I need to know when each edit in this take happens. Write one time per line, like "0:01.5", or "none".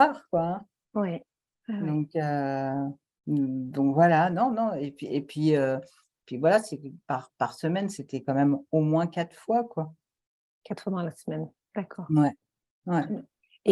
none